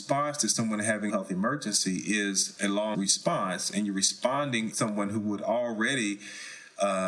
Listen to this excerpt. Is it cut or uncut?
cut